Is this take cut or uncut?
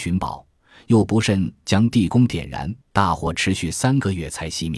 cut